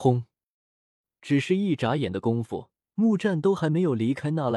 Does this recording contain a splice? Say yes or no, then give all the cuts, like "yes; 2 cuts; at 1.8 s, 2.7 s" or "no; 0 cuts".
yes; 1 cut; at 2.8 s